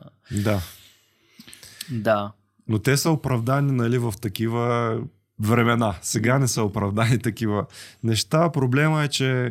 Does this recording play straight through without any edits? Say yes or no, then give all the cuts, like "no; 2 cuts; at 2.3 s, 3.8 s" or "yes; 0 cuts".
yes; 0 cuts